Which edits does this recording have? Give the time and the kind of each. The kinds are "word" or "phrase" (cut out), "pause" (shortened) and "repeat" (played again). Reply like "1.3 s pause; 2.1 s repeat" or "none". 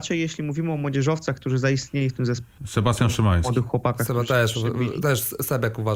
2.6 s pause